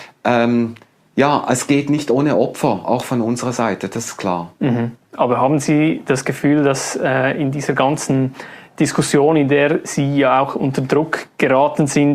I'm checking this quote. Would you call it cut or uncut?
cut